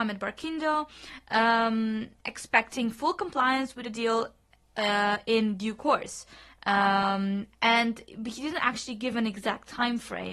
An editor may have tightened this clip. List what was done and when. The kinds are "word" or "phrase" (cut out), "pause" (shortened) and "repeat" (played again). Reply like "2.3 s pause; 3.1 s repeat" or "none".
none